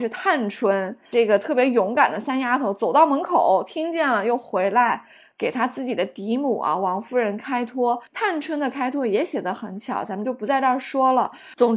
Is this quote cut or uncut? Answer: cut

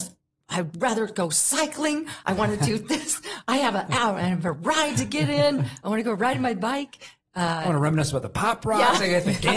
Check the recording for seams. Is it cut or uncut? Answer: uncut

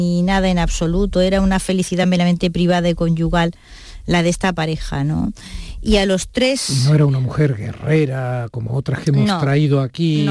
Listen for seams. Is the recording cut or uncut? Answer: uncut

